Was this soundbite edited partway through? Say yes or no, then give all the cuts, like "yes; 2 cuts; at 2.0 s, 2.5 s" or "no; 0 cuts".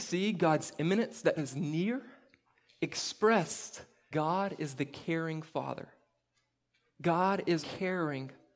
yes; 3 cuts; at 1.4 s, 4.1 s, 7.6 s